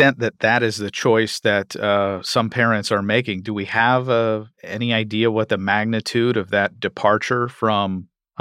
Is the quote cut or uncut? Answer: cut